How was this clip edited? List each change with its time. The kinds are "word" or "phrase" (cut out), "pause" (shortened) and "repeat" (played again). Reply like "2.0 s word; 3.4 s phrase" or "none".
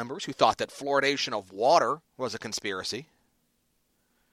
2.1 s pause